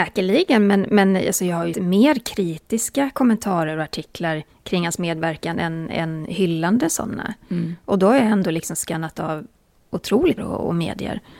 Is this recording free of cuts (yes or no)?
no